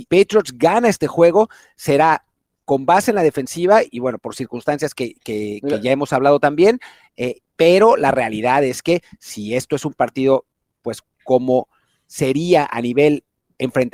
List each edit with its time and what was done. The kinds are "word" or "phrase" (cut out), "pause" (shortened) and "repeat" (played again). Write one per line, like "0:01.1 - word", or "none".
none